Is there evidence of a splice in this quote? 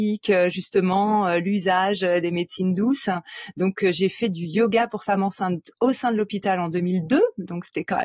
yes; 1 cut; at 5.7 s

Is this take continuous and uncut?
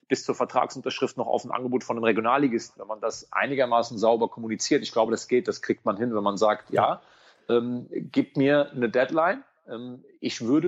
yes; 0 cuts

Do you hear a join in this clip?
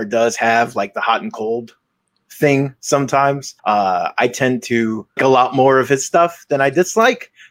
yes; 2 cuts; at 3.6 s, 5.2 s

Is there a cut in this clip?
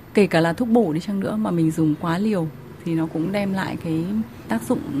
no; 0 cuts

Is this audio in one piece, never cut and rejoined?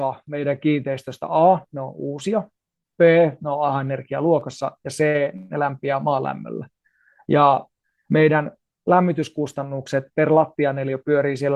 yes; 0 cuts

